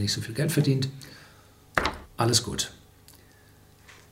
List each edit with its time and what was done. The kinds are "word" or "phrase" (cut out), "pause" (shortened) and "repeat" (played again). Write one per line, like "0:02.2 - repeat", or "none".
0:02.0 - pause